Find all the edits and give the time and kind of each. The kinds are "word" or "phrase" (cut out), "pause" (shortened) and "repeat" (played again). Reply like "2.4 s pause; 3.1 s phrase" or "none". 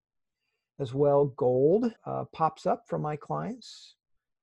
2.0 s pause